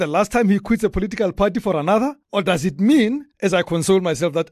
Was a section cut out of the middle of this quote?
yes; 2 cuts; at 2.2 s, 3.3 s

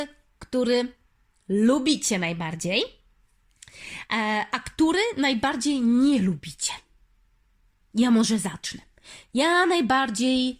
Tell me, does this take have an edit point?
no; 0 cuts

